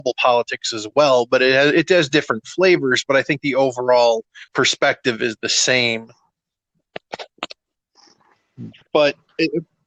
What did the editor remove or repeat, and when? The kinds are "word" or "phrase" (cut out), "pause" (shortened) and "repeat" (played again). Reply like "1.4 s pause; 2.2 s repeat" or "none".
4.5 s pause; 8.8 s pause